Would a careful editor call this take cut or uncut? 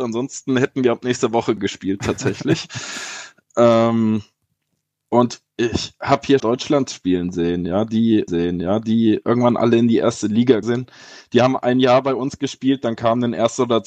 cut